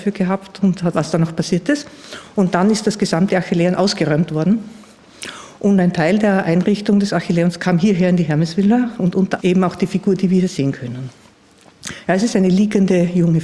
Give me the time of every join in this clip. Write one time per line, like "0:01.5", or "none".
0:00.9
0:09.4